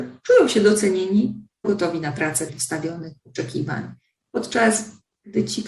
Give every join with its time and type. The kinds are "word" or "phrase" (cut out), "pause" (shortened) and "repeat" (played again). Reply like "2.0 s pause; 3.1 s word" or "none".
1.6 s word; 2.5 s word